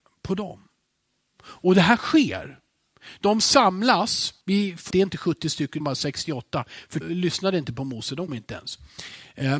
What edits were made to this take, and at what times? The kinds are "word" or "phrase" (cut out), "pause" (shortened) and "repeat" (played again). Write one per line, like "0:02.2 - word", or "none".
0:04.4 - pause
0:04.9 - phrase
0:05.8 - word
0:07.0 - word
0:08.3 - word